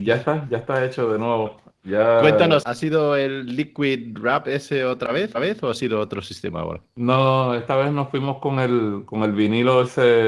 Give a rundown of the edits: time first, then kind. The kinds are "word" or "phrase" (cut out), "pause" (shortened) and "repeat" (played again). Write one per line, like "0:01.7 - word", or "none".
0:02.6 - word
0:05.3 - repeat